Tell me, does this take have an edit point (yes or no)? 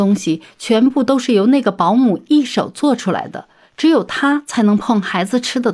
no